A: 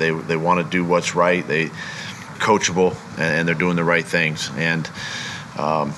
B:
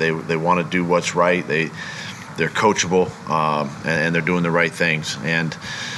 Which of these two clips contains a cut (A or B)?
A